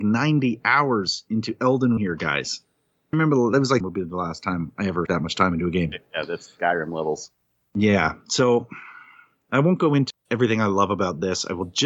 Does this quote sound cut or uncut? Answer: cut